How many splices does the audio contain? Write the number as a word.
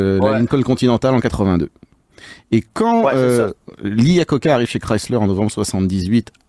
zero